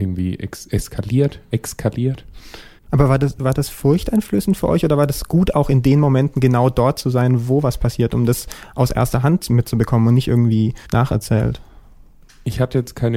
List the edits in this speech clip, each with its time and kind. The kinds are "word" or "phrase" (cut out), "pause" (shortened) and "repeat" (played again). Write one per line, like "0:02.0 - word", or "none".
0:10.8 - pause